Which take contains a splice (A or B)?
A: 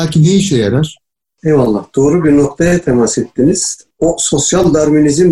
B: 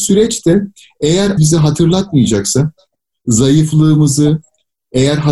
B